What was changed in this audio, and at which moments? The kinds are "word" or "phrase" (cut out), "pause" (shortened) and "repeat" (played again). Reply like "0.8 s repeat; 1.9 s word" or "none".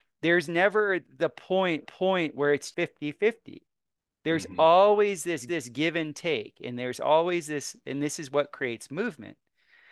1.8 s repeat; 2.7 s word; 5.5 s repeat